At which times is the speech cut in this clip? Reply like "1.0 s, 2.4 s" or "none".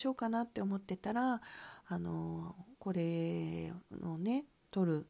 2.8 s